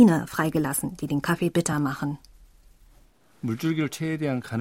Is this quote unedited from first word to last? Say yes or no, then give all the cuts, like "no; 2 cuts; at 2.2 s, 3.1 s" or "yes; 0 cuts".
yes; 0 cuts